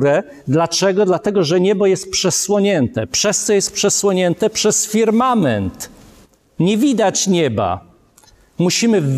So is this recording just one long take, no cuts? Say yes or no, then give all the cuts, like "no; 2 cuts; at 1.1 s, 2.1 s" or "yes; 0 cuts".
yes; 0 cuts